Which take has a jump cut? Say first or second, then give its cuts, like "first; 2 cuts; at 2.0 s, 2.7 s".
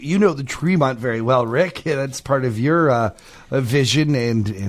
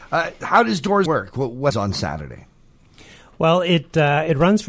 second; 2 cuts; at 1.1 s, 1.7 s